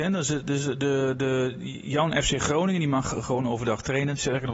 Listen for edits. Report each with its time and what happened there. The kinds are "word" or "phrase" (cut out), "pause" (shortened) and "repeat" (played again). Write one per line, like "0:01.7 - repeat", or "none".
none